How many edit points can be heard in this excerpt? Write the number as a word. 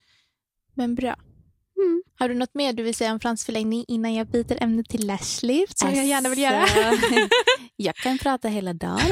one